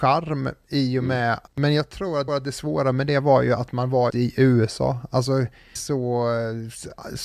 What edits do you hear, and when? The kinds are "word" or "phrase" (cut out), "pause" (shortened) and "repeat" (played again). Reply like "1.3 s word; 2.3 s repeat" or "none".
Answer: 1.5 s pause; 2.3 s repeat; 4.1 s word; 5.8 s phrase